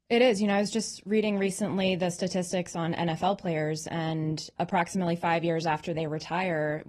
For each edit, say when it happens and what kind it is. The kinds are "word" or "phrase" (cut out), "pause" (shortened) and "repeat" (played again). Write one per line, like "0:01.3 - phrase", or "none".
0:04.6 - word